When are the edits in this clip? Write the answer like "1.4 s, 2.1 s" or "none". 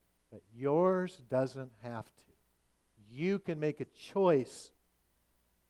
2.7 s